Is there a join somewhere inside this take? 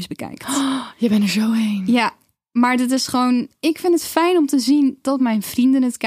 no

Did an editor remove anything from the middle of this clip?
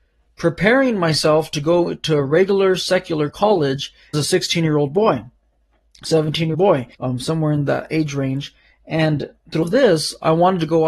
yes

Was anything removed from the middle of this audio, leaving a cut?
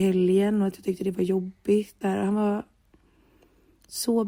yes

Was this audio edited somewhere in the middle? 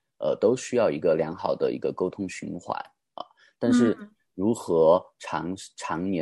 no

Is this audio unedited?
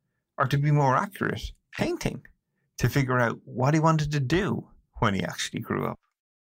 yes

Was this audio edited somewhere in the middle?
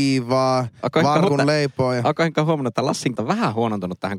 yes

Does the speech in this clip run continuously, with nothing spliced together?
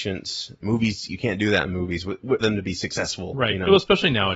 no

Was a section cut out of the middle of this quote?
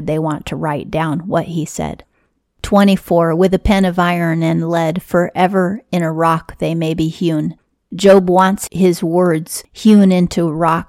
no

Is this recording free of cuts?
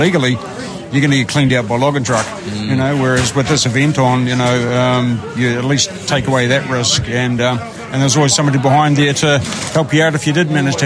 yes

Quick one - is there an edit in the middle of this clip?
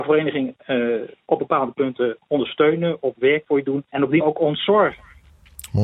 yes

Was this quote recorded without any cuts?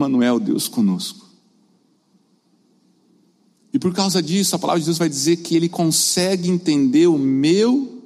yes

